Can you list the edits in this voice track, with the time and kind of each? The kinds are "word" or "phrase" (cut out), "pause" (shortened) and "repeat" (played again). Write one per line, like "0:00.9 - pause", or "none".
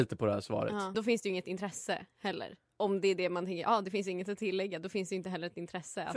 0:00.9 - word